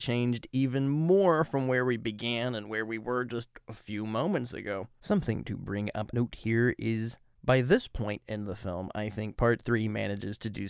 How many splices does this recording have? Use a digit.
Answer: 1